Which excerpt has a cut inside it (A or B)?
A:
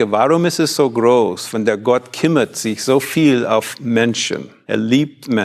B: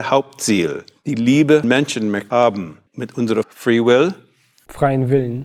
B